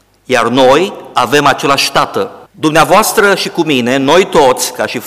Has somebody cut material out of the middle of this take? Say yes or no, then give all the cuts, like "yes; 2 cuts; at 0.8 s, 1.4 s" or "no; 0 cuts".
yes; 1 cut; at 2.5 s